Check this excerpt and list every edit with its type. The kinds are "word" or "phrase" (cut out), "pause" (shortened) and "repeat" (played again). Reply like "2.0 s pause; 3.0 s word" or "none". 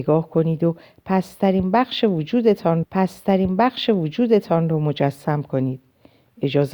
2.8 s repeat